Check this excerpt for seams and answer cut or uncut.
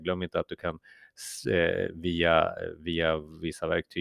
uncut